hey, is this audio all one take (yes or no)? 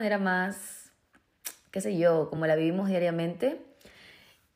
yes